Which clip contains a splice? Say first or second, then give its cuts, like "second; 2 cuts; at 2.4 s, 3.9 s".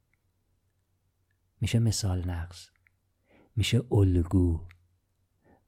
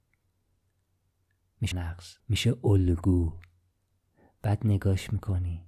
second; 2 cuts; at 1.7 s, 2.2 s